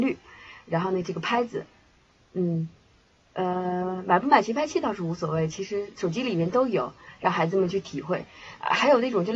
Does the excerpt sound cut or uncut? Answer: uncut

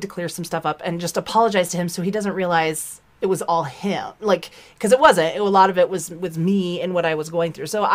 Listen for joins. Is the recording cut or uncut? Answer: uncut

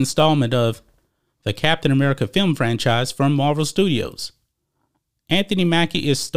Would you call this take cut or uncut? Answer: uncut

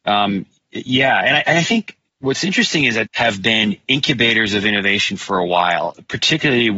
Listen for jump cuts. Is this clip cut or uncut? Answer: cut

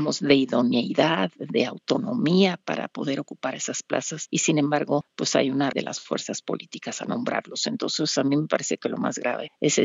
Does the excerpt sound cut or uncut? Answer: cut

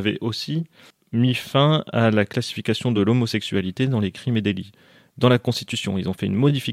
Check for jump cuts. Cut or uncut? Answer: uncut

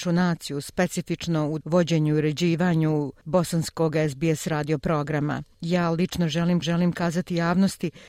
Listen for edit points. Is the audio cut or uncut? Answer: cut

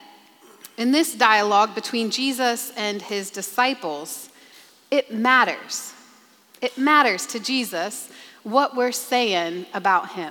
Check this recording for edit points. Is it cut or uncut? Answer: uncut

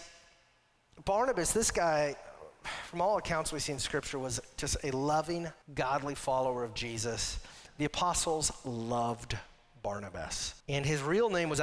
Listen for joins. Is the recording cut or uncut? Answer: cut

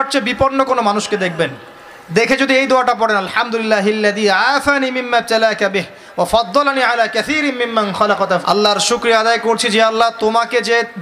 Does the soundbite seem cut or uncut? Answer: cut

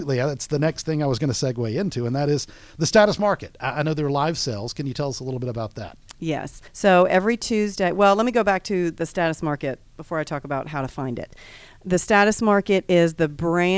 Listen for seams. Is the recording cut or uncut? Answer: cut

